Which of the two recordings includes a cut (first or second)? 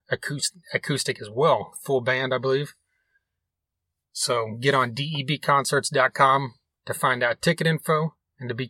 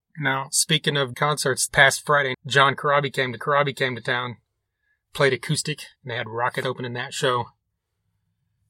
second